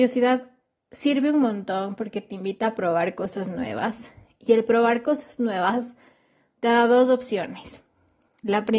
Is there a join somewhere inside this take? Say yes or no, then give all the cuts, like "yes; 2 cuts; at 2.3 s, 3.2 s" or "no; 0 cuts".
no; 0 cuts